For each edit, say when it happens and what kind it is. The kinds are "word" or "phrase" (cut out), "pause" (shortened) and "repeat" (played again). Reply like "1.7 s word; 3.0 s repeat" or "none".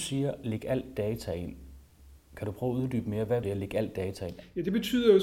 3.4 s word